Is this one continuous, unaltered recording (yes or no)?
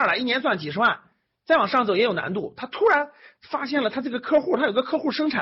yes